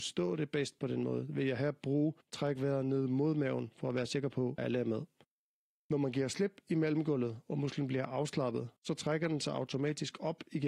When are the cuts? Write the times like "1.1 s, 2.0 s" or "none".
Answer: 2.2 s, 4.6 s, 5.2 s, 8.8 s